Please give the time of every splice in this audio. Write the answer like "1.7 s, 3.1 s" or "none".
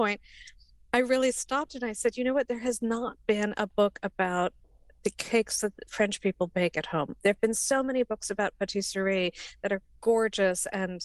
none